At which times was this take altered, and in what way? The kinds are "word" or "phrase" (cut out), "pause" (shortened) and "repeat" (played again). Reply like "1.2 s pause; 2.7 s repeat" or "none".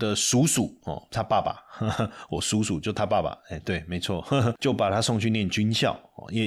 none

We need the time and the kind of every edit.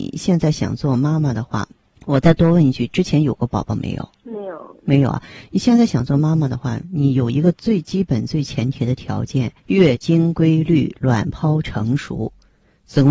1.8 s pause; 4.1 s pause; 9.6 s pause

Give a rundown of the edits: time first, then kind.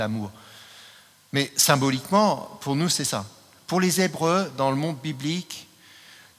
none

